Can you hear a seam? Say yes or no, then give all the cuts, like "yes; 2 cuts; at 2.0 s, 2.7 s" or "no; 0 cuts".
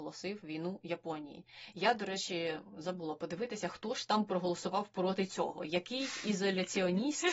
no; 0 cuts